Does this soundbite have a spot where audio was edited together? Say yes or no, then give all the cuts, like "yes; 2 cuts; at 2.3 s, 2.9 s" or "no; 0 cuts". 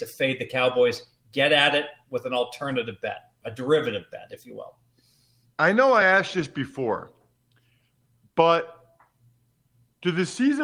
no; 0 cuts